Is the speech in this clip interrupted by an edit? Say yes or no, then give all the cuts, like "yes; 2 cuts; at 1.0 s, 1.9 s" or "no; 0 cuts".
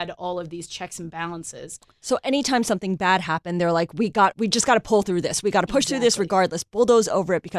yes; 1 cut; at 4.3 s